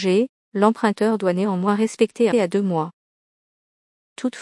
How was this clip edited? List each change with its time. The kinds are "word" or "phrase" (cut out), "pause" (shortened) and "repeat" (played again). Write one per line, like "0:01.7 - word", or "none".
0:02.3 - phrase

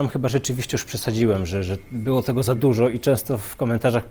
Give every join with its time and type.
none

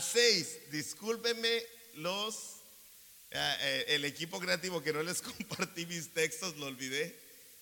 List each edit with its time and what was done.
none

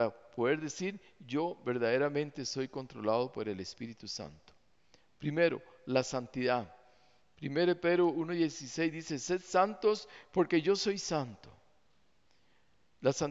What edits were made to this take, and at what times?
none

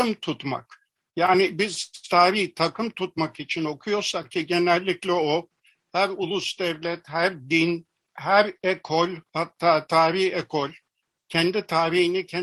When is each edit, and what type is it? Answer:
none

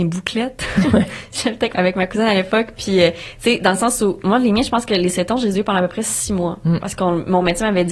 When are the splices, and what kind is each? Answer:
0:01.7 - word

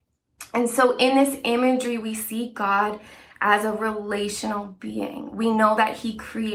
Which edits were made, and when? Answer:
none

